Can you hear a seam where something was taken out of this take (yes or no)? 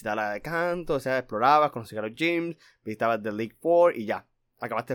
no